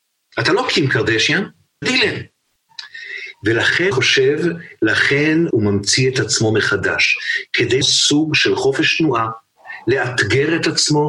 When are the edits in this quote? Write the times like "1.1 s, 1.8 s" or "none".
1.8 s, 3.9 s, 5.5 s, 7.8 s